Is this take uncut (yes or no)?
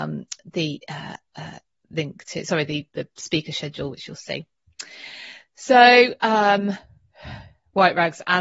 yes